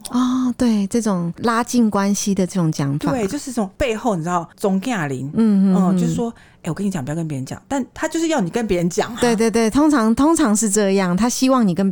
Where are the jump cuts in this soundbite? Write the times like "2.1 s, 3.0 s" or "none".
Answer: none